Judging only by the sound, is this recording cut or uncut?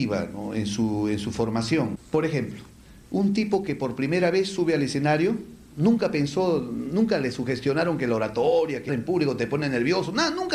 cut